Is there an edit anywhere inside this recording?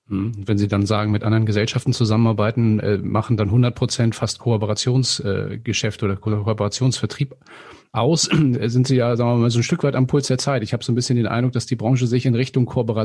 no; 0 cuts

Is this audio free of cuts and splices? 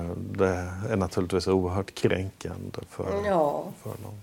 yes; 0 cuts

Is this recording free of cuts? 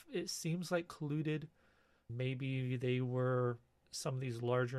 no; 2 cuts; at 2.1 s, 3.8 s

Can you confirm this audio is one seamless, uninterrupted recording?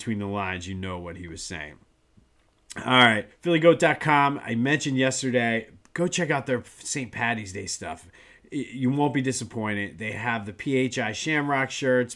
no; 1 cut; at 3.3 s

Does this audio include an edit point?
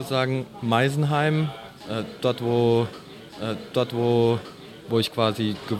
yes; 1 cut; at 3.3 s

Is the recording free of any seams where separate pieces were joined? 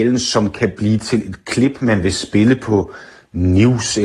yes; 0 cuts

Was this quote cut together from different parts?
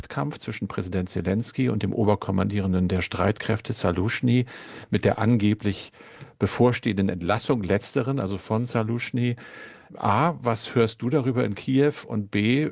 no; 0 cuts

